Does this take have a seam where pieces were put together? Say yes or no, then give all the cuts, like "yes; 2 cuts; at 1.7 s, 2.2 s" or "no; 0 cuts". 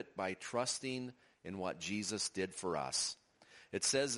no; 0 cuts